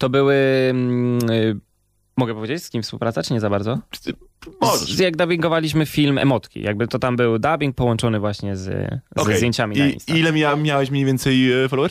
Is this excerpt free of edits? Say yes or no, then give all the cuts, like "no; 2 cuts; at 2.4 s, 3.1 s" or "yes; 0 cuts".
yes; 0 cuts